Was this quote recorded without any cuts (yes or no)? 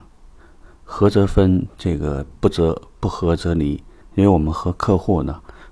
no